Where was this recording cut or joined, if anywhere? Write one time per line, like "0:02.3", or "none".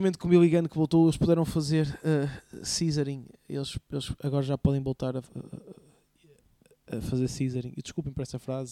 none